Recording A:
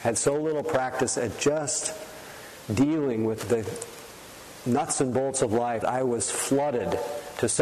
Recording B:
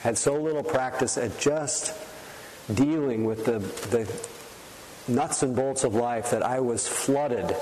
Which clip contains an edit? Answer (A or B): A